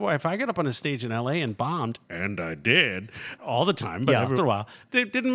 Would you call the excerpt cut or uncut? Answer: cut